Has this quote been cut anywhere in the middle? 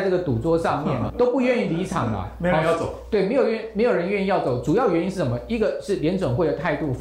yes; 1 cut; at 1.1 s

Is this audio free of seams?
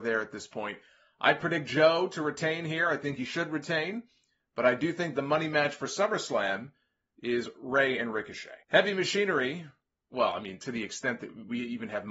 no; 1 cut; at 8.6 s

